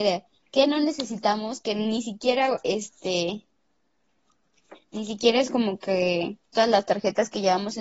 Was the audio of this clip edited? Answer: yes; 1 cut; at 6.5 s

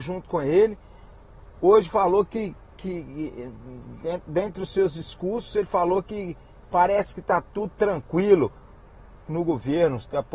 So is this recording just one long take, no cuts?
yes; 0 cuts

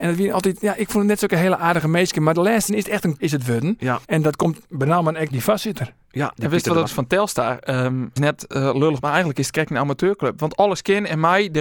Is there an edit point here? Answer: yes; 7 cuts; at 2.7 s, 3.2 s, 4.0 s, 5.3 s, 6.8 s, 8.2 s, 9.0 s

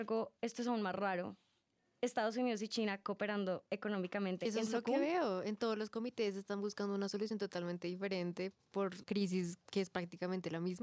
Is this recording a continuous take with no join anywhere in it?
no; 1 cut; at 9.0 s

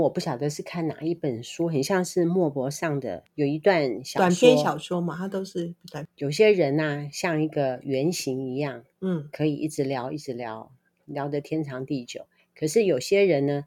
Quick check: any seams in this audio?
no; 0 cuts

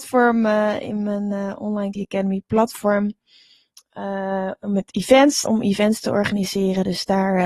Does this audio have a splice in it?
yes; 2 cuts; at 1.9 s, 5.5 s

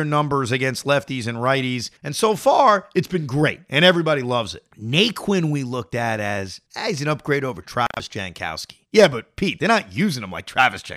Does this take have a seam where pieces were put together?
yes; 4 cuts; at 2.0 s, 4.7 s, 6.7 s, 8.9 s

